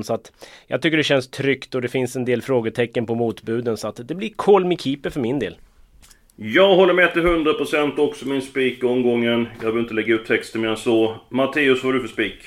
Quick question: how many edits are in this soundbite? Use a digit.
0